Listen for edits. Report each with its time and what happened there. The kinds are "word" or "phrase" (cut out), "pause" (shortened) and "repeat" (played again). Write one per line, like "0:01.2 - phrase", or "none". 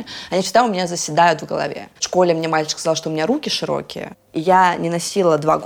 0:02.0 - pause